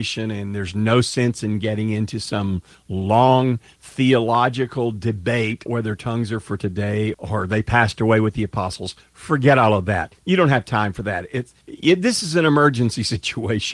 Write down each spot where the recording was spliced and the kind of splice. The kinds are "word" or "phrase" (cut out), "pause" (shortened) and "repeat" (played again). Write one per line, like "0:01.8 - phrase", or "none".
0:05.7 - word
0:07.1 - word
0:10.2 - pause
0:11.6 - pause